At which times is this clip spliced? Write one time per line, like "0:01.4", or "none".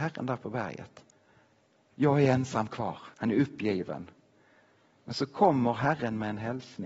0:03.1